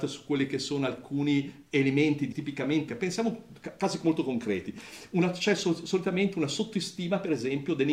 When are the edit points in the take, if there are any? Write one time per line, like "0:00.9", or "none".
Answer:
0:01.7
0:02.3
0:02.9